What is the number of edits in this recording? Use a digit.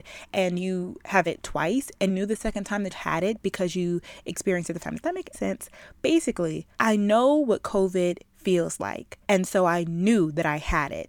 8